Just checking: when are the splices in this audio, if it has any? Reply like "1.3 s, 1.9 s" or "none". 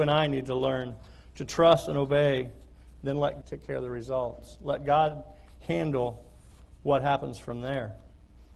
3.4 s